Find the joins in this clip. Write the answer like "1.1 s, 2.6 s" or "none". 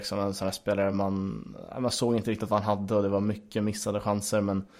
none